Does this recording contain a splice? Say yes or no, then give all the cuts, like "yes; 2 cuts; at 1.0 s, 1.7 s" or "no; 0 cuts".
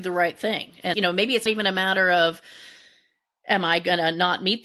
yes; 2 cuts; at 0.9 s, 1.5 s